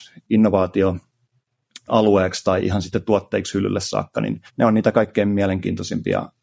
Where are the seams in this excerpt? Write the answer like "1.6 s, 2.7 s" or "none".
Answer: 1.9 s, 4.5 s